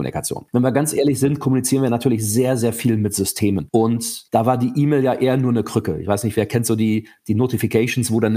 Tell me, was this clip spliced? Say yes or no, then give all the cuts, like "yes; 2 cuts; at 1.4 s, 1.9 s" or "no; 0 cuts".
yes; 1 cut; at 4.3 s